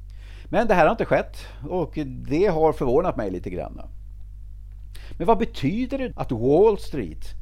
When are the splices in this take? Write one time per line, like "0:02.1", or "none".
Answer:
0:06.1